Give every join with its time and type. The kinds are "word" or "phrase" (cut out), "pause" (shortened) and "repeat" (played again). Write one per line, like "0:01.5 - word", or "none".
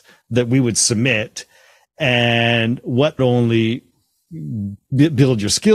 0:03.2 - phrase